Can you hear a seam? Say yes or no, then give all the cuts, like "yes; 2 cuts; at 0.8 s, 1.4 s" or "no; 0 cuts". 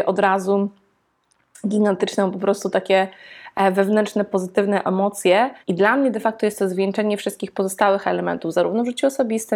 yes; 1 cut; at 5.6 s